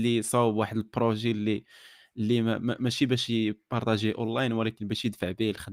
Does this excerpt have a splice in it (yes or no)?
no